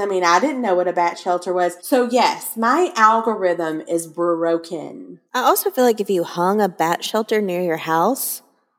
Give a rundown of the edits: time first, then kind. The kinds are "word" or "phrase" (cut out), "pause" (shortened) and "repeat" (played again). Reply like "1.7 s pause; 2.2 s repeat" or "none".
1.8 s pause; 5.3 s pause